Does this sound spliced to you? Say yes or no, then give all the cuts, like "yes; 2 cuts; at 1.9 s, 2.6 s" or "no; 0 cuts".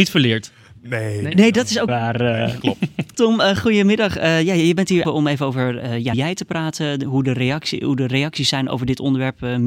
yes; 4 cuts; at 1.9 s, 3.1 s, 5.0 s, 6.1 s